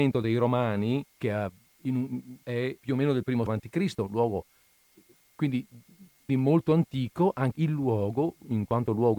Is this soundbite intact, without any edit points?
no; 6 cuts; at 1.2 s, 2.4 s, 2.8 s, 3.5 s, 6.3 s, 7.5 s

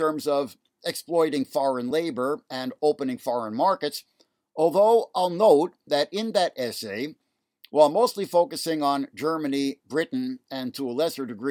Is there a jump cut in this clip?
no; 0 cuts

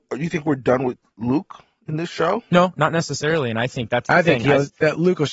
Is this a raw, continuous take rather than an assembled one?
yes; 0 cuts

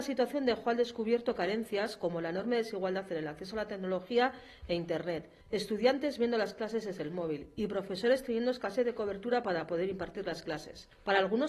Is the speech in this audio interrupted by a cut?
no; 0 cuts

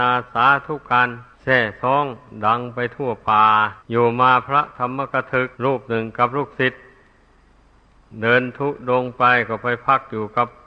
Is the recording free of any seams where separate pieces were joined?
no; 3 cuts; at 1.3 s, 3.8 s, 5.5 s

